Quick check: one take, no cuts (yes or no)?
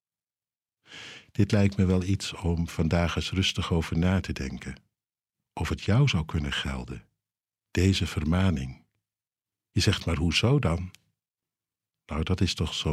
yes